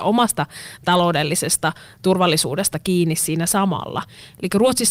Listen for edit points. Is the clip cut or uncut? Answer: uncut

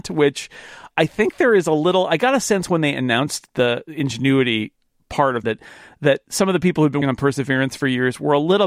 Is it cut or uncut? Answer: cut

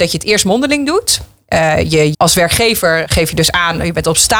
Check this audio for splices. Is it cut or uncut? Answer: cut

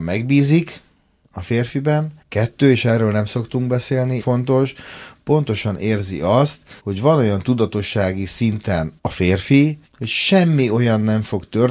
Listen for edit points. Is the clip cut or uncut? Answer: cut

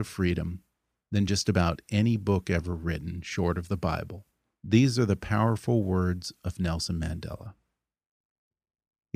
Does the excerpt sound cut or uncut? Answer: uncut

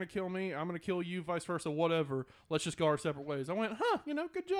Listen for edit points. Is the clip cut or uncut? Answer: uncut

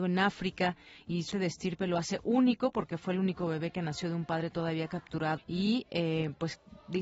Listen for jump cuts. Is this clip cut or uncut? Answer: cut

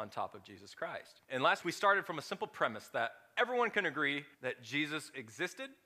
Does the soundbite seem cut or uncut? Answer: cut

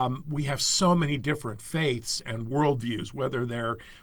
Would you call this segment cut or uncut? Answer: uncut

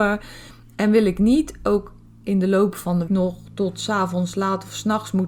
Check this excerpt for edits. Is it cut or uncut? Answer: cut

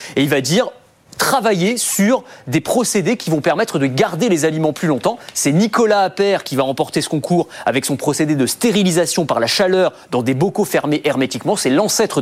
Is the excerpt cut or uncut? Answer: uncut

